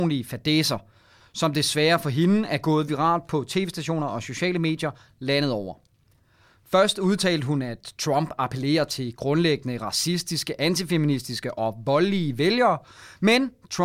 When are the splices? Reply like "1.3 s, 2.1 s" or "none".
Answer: none